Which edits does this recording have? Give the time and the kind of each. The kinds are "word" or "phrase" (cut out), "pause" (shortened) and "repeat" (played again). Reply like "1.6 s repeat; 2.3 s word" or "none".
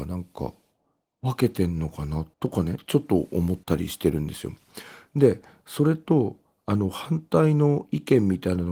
2.3 s pause; 3.6 s pause